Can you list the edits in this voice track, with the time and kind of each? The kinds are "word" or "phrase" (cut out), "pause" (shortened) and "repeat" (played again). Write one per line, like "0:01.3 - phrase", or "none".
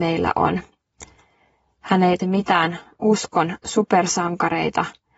0:02.2 - word